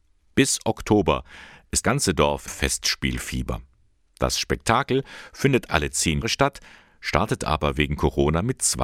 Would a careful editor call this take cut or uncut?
cut